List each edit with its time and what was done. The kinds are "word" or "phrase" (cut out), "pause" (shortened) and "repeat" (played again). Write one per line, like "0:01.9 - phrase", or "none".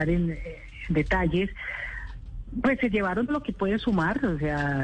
0:03.3 - word